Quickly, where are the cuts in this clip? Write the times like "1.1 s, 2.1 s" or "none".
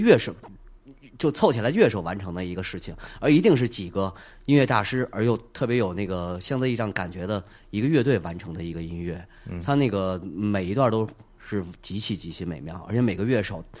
none